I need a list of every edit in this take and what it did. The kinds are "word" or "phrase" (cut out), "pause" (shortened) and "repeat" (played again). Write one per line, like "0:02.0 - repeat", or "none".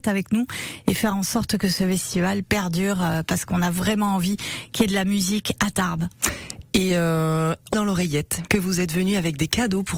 0:07.7 - phrase